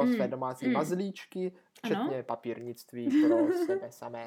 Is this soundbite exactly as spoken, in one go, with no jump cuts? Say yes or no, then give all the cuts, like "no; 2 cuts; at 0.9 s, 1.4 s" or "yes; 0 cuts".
yes; 0 cuts